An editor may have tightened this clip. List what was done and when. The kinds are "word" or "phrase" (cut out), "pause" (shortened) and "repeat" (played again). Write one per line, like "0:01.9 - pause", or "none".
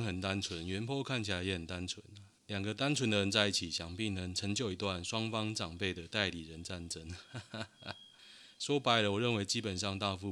0:02.4 - pause

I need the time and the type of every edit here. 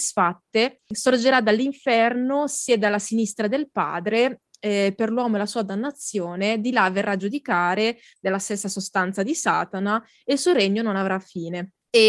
none

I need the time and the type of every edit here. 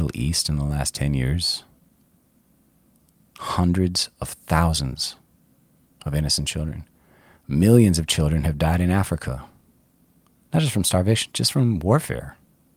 none

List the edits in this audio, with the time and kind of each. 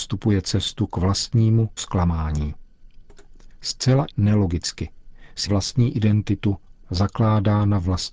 0:01.8 - word
0:04.1 - word
0:05.5 - word

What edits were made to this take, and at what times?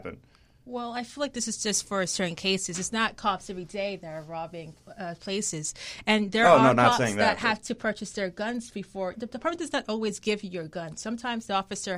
0:09.1 - word

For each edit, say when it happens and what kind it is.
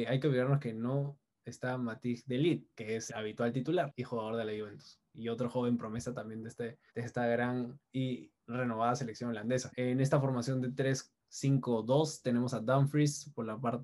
0:03.1 - word
0:06.9 - pause
0:09.7 - word

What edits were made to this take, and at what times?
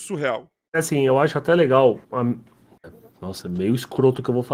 0:02.0 - pause

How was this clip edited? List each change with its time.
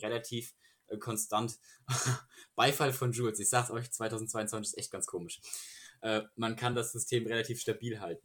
none

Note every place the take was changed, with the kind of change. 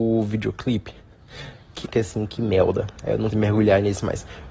0:01.8 - word
0:03.3 - word

